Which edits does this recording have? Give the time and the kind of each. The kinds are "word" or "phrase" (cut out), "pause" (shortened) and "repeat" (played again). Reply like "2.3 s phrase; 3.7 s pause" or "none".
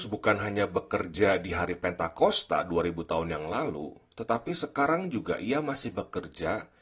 none